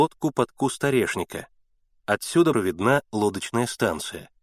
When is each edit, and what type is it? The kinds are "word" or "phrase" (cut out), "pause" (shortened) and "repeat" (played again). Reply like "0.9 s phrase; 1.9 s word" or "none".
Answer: 2.5 s phrase